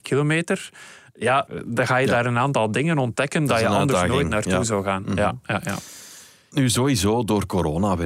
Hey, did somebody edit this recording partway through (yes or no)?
no